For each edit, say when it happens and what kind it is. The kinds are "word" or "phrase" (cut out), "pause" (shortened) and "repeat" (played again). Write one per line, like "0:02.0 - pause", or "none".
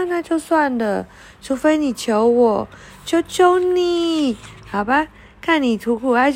none